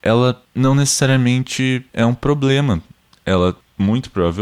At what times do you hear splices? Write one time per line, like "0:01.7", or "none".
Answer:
0:01.9